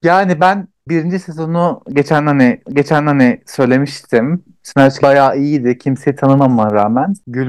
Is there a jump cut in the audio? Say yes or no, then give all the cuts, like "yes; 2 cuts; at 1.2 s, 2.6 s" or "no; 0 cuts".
yes; 2 cuts; at 2.6 s, 5.0 s